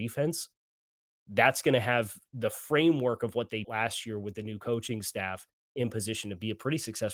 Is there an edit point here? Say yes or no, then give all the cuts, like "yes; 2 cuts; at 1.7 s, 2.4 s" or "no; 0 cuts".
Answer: yes; 1 cut; at 3.6 s